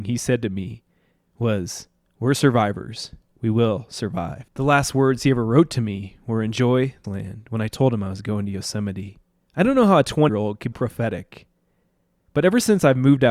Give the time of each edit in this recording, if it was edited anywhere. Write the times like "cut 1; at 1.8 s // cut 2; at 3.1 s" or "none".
cut 1; at 4.5 s // cut 2; at 7.0 s // cut 3; at 9.4 s // cut 4; at 10.3 s // cut 5; at 10.7 s

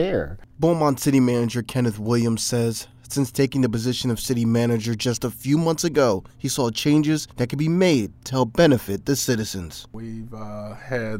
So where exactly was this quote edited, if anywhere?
cut 1; at 6.3 s // cut 2; at 7.3 s

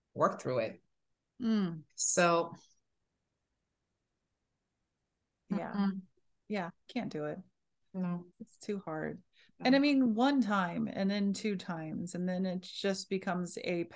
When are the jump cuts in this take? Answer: cut 1; at 1.9 s // cut 2; at 8.3 s

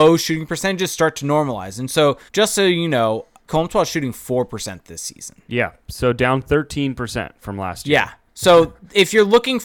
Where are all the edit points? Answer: cut 1; at 2.3 s // cut 2; at 3.5 s // cut 3; at 8.3 s

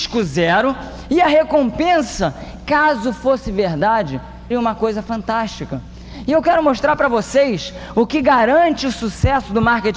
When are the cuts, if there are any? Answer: cut 1; at 4.5 s

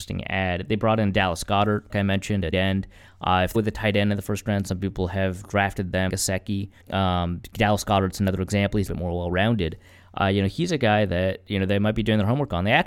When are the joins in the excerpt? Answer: cut 1; at 1.9 s // cut 2; at 2.5 s // cut 3; at 3.5 s // cut 4; at 6.1 s // cut 5; at 6.8 s // cut 6; at 8.9 s

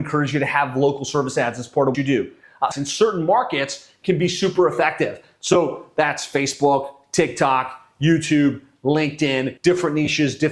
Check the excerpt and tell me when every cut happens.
cut 1; at 1.9 s // cut 2; at 2.7 s // cut 3; at 9.6 s

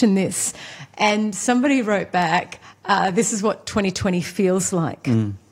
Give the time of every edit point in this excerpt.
none

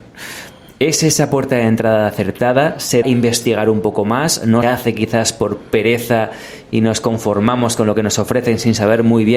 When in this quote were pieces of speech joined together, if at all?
cut 1; at 3.0 s // cut 2; at 4.6 s

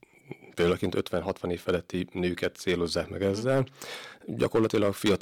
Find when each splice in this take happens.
none

